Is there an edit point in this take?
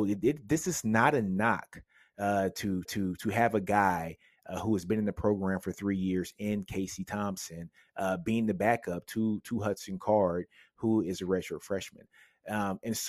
yes; 1 cut; at 2.9 s

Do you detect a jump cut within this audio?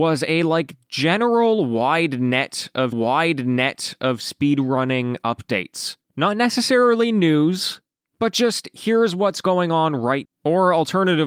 yes; 3 cuts; at 2.9 s, 6.0 s, 10.2 s

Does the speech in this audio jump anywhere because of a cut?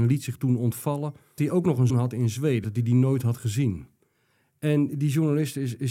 yes; 3 cuts; at 1.4 s, 1.9 s, 2.6 s

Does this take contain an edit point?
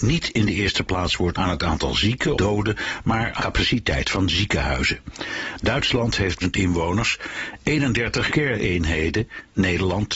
yes; 5 cuts; at 1.3 s, 2.4 s, 3.4 s, 6.4 s, 8.3 s

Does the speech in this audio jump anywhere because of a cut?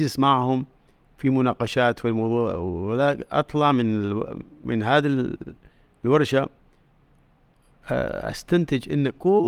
no; 0 cuts

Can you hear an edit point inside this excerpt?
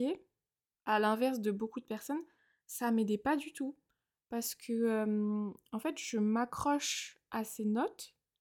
no; 0 cuts

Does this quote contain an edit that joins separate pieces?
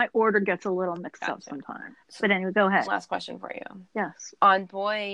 yes; 3 cuts; at 2.0 s, 2.9 s, 3.9 s

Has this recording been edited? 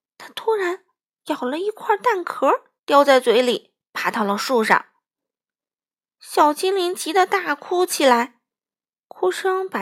yes; 1 cut; at 2.8 s

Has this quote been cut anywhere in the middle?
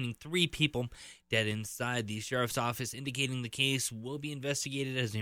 no; 0 cuts

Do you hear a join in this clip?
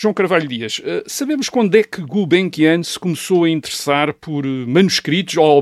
no; 0 cuts

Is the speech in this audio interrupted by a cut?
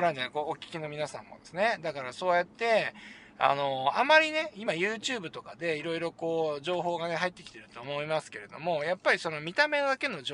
no; 0 cuts

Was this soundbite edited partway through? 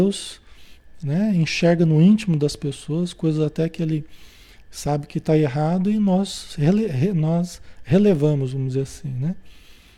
no; 0 cuts

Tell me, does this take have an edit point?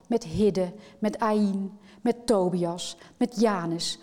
no; 0 cuts

